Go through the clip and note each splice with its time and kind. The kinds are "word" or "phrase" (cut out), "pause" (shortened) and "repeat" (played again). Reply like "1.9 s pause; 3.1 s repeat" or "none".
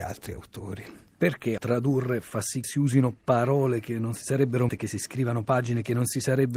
1.6 s word; 2.6 s word; 4.7 s phrase